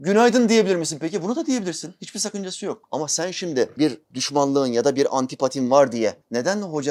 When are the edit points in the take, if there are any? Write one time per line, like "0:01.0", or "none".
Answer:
0:03.8